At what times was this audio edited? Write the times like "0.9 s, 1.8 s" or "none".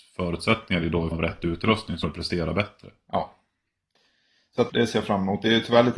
1.1 s, 2.0 s, 4.7 s